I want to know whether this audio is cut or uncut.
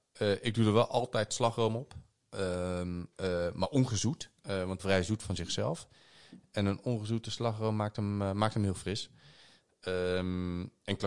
cut